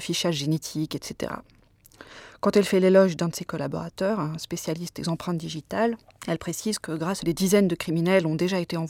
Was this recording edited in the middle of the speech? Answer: yes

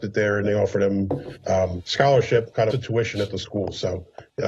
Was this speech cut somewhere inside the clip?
yes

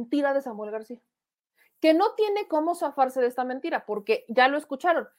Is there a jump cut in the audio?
no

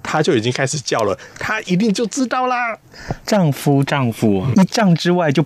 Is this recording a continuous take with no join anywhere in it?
no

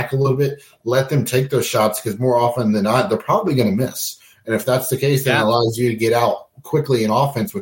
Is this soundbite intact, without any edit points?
yes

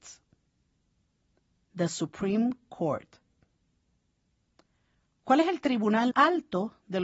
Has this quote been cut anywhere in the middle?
yes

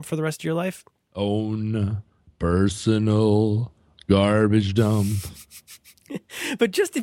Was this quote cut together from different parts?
no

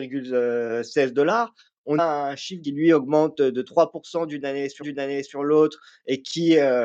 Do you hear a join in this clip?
yes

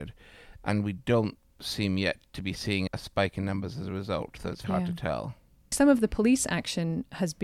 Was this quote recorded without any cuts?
no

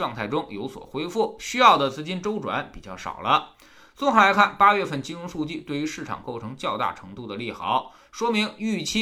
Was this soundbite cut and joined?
no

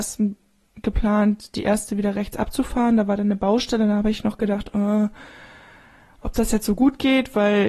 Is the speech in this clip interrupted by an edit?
no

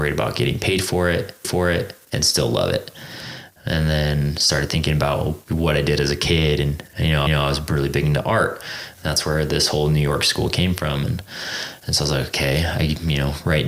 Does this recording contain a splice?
yes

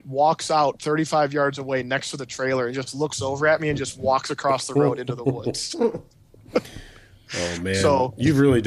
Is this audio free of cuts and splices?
yes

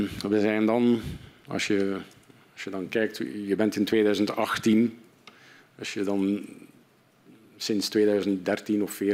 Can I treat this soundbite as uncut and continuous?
yes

